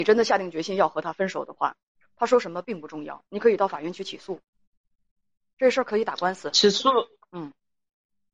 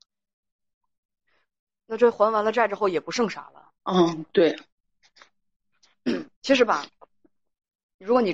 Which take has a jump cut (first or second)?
second